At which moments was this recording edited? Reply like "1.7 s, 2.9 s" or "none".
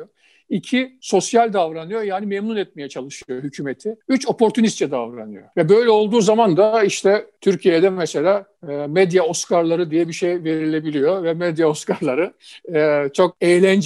none